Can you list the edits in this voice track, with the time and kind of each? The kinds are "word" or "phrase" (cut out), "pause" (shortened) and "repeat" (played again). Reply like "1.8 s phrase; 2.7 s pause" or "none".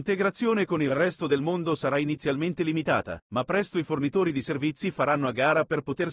3.2 s pause